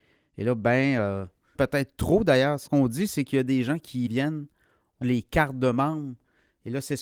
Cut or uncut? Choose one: cut